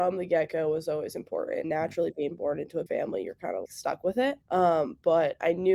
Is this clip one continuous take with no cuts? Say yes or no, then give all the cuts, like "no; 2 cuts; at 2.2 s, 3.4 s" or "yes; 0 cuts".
no; 4 cuts; at 1.6 s, 2.9 s, 3.7 s, 4.4 s